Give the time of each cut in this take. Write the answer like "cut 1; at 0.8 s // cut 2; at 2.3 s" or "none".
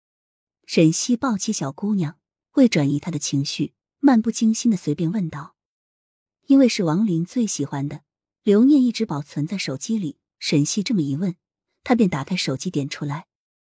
none